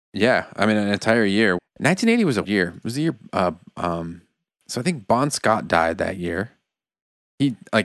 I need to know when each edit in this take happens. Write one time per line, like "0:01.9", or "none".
0:01.6
0:02.5

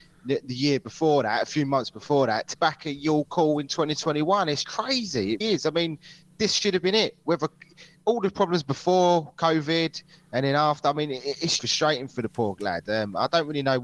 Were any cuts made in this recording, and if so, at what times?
0:02.5
0:04.6
0:05.4
0:11.6

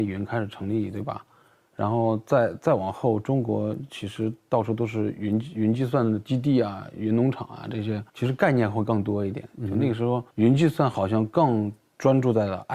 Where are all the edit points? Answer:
0:08.1
0:10.3

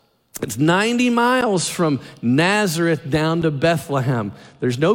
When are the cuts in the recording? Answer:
none

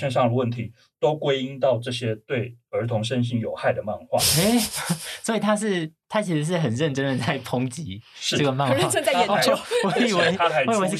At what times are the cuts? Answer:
none

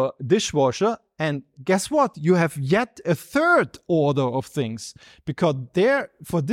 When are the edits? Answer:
none

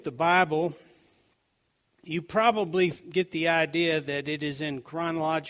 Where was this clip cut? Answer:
none

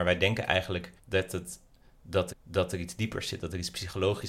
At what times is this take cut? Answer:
0:01.0
0:02.3

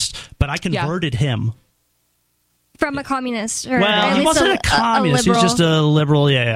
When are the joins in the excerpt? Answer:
none

